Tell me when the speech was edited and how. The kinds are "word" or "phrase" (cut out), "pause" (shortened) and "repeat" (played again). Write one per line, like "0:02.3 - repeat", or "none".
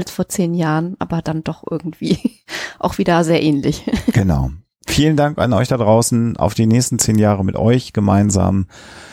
none

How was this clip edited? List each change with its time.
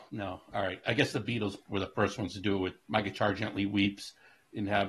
0:01.6 - word
0:02.8 - pause

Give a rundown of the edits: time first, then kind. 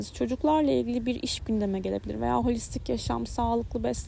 none

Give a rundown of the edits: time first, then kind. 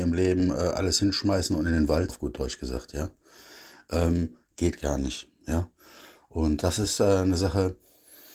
0:02.1 - word
0:06.6 - word

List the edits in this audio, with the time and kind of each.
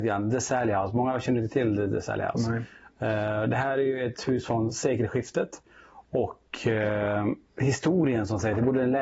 none

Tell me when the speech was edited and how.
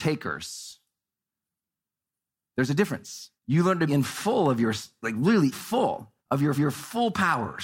0:03.4 - pause
0:03.9 - word
0:05.0 - word
0:05.5 - word
0:06.2 - pause
0:06.6 - repeat

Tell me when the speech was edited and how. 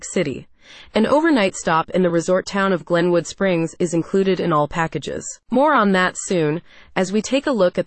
none

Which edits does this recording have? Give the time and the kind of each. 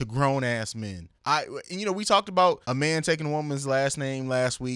0:01.2 - pause
0:02.6 - pause

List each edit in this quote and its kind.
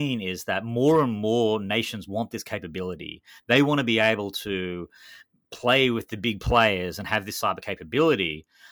none

